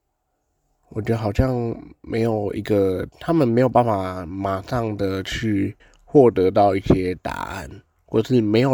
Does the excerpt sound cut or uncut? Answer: cut